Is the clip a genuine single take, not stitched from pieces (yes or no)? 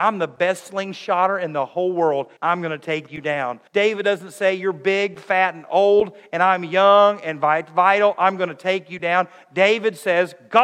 no